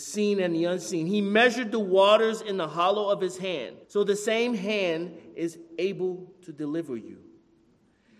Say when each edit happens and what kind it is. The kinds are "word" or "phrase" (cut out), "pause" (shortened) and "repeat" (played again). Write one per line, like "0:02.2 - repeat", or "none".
0:03.8 - pause